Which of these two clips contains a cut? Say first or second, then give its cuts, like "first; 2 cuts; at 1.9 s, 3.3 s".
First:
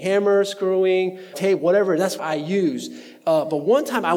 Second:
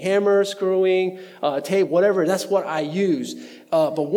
first; 2 cuts; at 1.3 s, 2.2 s